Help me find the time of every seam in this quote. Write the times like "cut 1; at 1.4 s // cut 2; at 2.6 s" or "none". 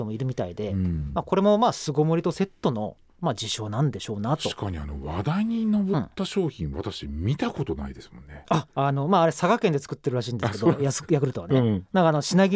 cut 1; at 8.7 s